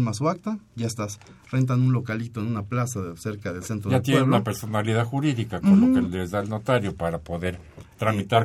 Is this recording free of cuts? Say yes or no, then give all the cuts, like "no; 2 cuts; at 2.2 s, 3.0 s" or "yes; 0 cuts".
yes; 0 cuts